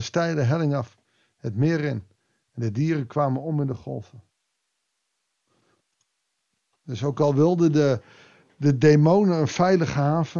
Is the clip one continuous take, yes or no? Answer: yes